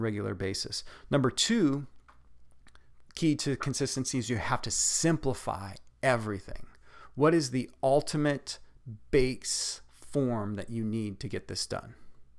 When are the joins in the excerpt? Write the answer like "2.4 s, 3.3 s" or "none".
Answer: none